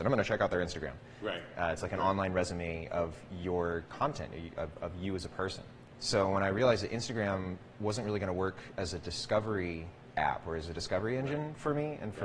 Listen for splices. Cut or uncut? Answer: uncut